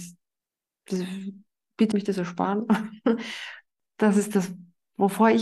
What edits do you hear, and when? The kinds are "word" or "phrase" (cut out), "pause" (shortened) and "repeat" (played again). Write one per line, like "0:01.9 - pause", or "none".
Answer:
0:01.9 - word